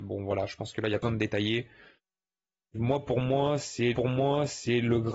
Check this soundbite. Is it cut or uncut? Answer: cut